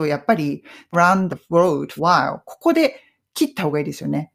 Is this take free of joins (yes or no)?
no